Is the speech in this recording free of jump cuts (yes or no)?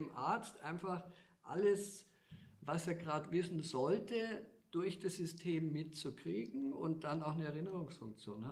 yes